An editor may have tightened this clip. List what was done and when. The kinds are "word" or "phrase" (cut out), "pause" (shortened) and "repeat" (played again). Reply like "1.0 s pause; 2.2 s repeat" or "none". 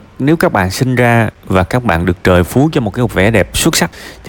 none